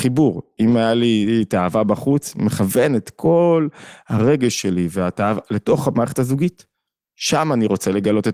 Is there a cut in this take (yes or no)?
no